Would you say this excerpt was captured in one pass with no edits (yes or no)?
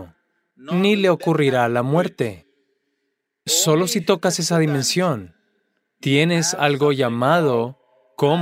yes